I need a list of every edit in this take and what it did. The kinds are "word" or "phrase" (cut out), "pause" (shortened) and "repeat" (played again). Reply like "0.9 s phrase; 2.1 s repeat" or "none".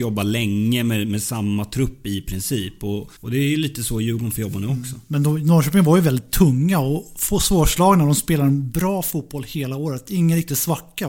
3.2 s pause